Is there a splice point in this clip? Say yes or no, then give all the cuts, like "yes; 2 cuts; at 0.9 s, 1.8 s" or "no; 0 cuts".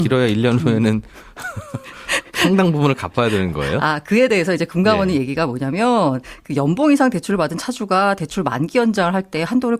no; 0 cuts